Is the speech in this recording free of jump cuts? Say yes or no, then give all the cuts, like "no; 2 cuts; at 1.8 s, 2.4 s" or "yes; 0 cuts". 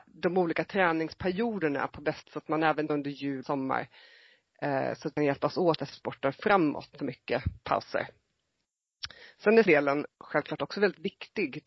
no; 8 cuts; at 2.2 s, 2.9 s, 3.4 s, 5.2 s, 5.9 s, 6.9 s, 9.7 s, 10.1 s